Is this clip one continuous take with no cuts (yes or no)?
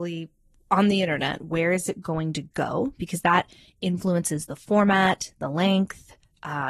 yes